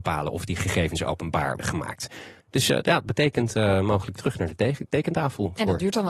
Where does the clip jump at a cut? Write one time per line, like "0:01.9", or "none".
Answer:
0:01.6